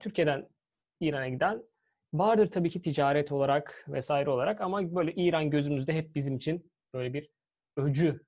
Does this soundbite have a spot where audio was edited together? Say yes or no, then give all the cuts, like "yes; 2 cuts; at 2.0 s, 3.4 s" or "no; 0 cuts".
no; 0 cuts